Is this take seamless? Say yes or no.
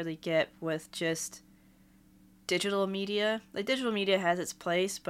yes